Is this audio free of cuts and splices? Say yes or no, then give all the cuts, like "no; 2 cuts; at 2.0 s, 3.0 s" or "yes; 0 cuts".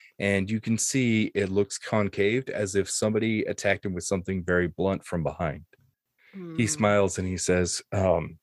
yes; 0 cuts